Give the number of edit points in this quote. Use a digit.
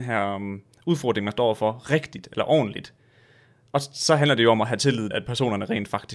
1